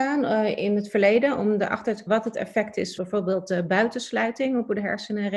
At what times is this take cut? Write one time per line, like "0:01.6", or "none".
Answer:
0:02.1
0:03.0